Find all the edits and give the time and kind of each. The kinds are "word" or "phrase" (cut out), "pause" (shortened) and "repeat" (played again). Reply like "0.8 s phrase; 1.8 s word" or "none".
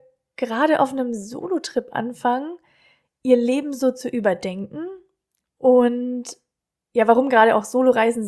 none